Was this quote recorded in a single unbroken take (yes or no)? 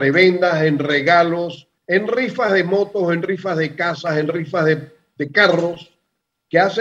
yes